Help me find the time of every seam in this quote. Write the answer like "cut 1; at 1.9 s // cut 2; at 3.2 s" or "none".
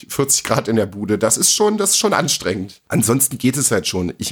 none